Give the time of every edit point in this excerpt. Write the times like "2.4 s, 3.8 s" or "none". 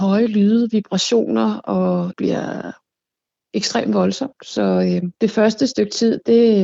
2.1 s, 5.2 s